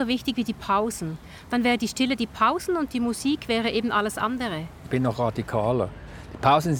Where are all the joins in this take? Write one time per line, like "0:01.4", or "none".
none